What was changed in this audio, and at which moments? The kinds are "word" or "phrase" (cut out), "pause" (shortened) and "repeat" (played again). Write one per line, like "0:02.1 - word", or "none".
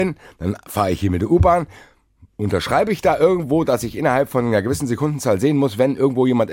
none